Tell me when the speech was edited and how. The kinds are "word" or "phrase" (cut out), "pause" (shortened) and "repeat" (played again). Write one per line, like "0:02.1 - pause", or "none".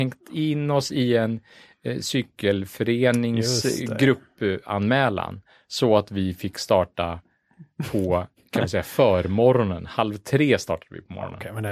none

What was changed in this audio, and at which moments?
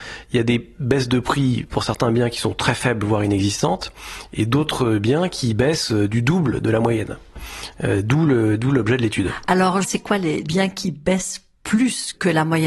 0:09.8 - word

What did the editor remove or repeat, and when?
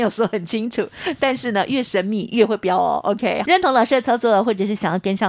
0:03.4 - word

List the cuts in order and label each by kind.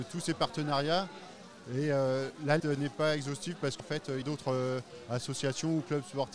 0:02.6 - word
0:03.8 - word
0:04.2 - phrase

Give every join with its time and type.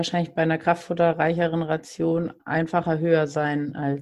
0:02.4 - pause

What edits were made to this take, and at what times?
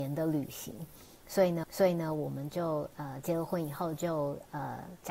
0:01.6 - repeat

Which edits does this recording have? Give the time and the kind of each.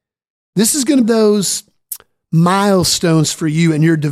0:01.0 - phrase

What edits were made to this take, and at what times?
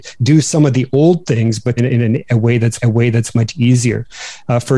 0:01.8 - phrase
0:02.8 - repeat

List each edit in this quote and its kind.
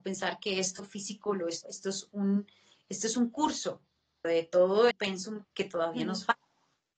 0:01.6 - word
0:04.2 - word
0:04.9 - word
0:05.4 - word

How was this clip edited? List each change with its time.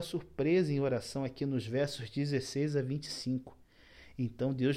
none

